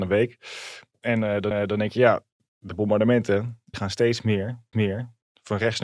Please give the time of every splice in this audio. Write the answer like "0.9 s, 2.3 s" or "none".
1.5 s, 3.7 s, 4.7 s